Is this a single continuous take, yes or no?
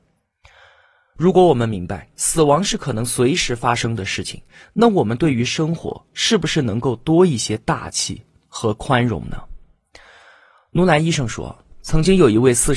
yes